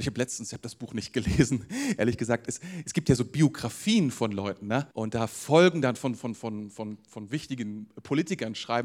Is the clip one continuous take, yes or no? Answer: no